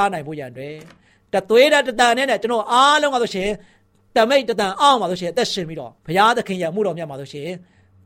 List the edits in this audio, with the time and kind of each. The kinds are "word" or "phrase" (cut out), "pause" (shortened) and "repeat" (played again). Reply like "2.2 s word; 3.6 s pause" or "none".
6.0 s pause